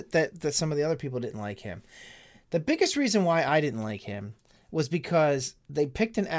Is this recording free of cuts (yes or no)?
yes